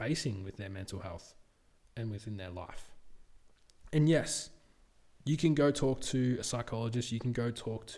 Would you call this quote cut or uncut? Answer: uncut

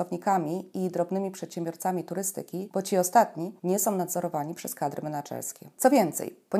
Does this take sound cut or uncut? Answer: uncut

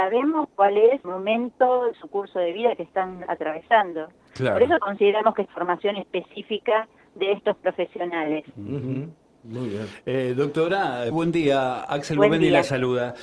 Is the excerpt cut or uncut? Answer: cut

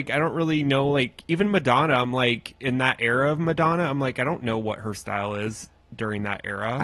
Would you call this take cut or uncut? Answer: uncut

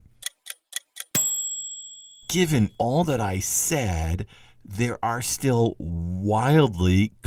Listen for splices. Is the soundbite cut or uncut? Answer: uncut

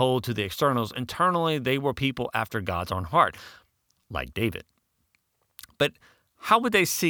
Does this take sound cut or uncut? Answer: uncut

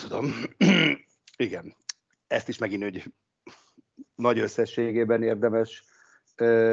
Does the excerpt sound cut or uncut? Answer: uncut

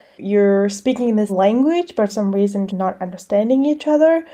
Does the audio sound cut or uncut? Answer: cut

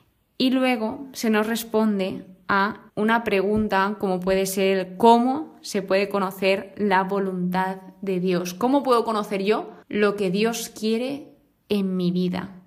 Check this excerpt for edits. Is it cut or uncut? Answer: cut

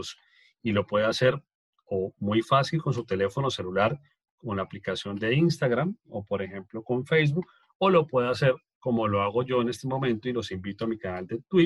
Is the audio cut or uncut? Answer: uncut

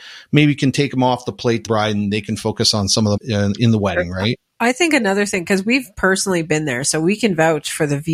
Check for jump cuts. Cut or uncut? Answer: cut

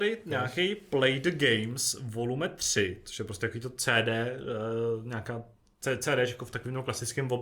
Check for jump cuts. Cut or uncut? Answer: uncut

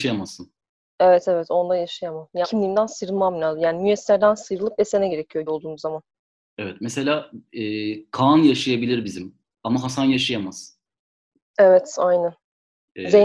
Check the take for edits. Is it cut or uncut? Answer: cut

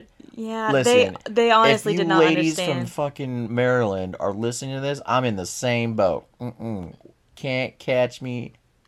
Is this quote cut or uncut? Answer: uncut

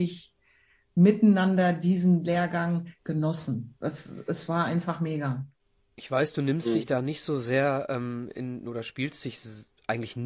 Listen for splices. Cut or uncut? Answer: uncut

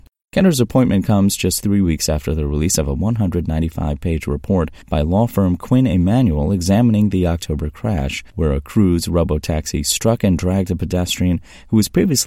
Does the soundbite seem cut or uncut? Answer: cut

